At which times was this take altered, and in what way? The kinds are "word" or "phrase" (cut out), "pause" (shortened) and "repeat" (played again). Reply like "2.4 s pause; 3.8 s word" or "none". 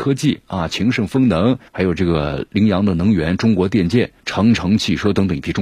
1.7 s pause; 4.2 s pause